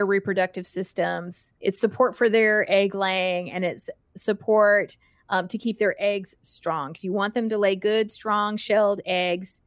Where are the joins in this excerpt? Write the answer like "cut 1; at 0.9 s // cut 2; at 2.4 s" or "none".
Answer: cut 1; at 1.6 s